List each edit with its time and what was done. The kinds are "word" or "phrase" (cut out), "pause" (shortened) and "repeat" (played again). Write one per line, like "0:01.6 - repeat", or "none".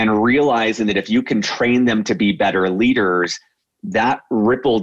none